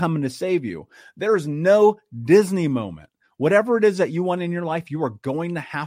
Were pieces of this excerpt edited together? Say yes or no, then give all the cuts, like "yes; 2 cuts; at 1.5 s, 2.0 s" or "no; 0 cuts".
no; 0 cuts